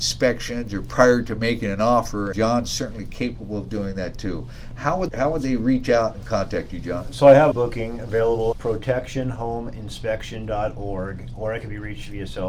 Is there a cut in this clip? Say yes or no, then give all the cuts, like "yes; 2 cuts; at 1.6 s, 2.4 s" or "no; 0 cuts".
yes; 4 cuts; at 2.3 s, 5.1 s, 7.5 s, 8.5 s